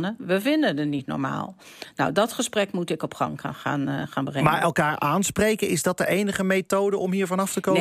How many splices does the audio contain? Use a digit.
0